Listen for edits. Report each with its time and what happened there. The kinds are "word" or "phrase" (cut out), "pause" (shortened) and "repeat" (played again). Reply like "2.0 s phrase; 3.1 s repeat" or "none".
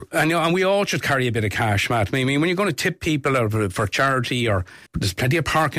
4.9 s pause